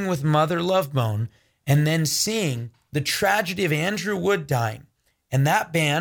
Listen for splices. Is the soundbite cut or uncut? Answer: uncut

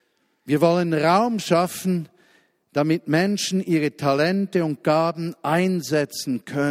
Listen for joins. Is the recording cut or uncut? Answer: uncut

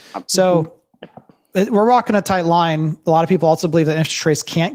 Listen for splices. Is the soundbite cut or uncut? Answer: cut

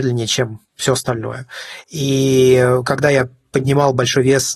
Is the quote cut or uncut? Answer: uncut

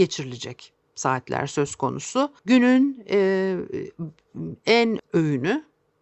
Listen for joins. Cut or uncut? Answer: cut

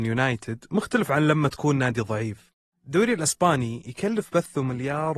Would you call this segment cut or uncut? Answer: uncut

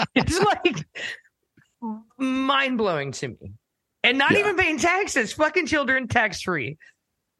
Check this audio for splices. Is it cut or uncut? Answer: uncut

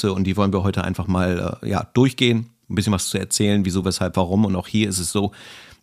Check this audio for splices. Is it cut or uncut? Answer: uncut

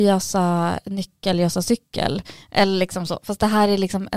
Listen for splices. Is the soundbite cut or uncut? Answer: uncut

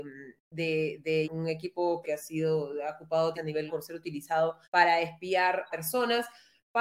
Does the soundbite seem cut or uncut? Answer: cut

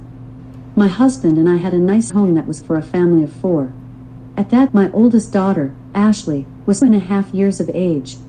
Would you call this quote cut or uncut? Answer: cut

